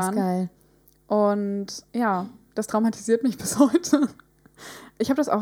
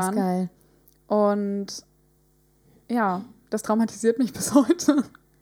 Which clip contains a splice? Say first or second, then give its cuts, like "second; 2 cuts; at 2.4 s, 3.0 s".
first; 1 cut; at 1.9 s